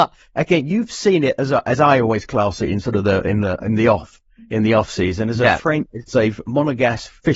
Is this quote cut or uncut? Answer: uncut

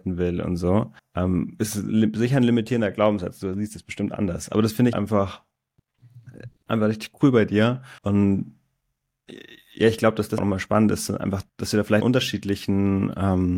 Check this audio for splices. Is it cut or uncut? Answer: cut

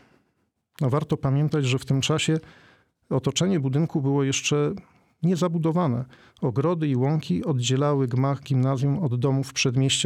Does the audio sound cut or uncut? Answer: uncut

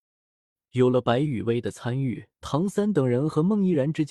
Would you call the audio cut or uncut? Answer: cut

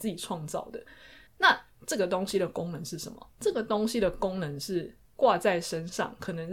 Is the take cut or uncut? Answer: cut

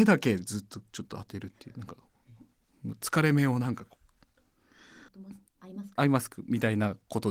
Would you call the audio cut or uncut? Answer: cut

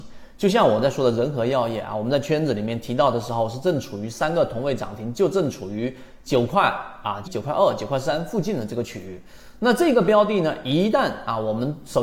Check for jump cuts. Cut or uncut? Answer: cut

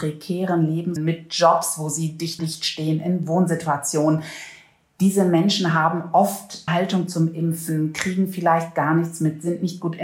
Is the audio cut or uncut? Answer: cut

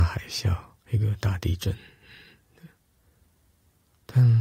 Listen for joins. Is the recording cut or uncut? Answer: uncut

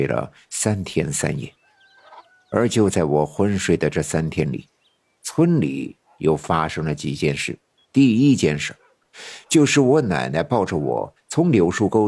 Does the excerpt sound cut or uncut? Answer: cut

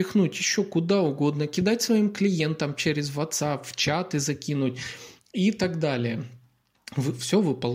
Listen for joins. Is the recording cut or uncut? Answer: uncut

